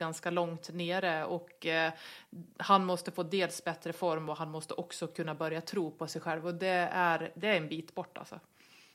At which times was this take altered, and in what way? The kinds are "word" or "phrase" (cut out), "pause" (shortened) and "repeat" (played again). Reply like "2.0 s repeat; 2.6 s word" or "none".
none